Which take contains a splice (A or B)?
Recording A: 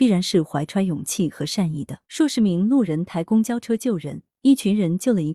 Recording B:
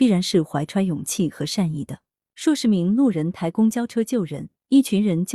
A